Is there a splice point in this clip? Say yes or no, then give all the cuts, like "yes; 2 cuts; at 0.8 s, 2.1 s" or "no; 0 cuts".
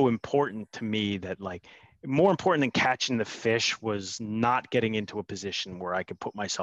no; 0 cuts